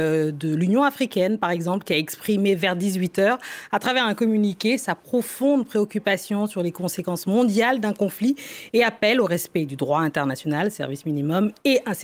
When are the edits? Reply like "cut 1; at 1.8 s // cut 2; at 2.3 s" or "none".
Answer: none